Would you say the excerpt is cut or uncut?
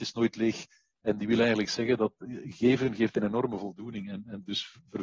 uncut